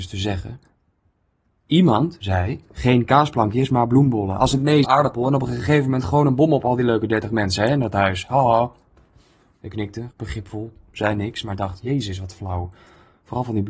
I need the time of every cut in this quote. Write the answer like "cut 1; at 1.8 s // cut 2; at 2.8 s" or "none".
cut 1; at 2.7 s // cut 2; at 4.8 s // cut 3; at 10.1 s